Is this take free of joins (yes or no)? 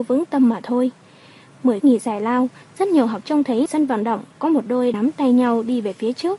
no